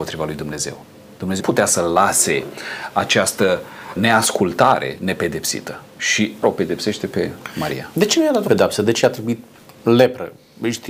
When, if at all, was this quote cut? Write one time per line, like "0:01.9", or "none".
0:01.4
0:04.0
0:06.4
0:08.5